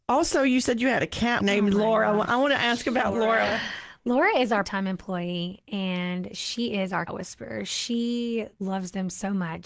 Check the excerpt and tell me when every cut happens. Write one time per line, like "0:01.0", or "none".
0:01.4
0:04.6
0:07.1